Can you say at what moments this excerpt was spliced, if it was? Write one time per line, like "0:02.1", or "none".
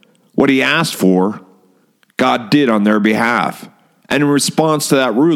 none